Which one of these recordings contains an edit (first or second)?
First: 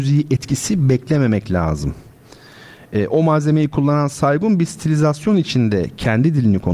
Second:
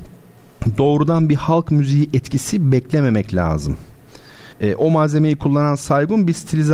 second